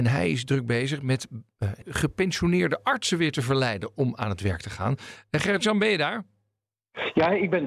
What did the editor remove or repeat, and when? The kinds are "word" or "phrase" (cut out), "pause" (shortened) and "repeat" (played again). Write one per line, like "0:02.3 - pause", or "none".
none